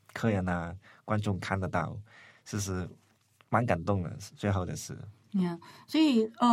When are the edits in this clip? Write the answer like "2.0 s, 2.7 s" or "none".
none